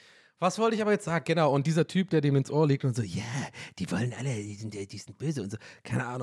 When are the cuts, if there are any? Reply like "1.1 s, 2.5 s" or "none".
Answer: none